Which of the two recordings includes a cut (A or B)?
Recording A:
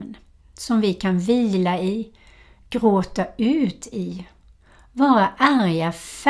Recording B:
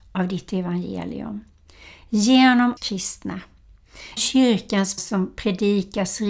B